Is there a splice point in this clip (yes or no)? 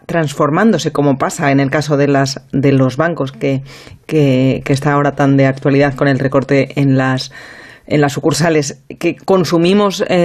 no